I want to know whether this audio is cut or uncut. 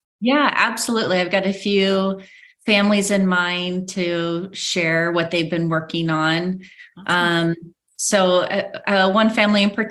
uncut